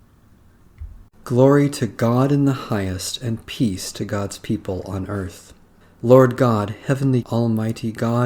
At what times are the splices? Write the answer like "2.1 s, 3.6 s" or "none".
5.8 s, 7.2 s